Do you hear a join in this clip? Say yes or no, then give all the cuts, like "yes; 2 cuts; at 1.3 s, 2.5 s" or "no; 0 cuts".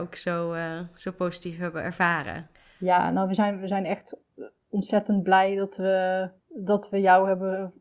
yes; 2 cuts; at 2.5 s, 6.4 s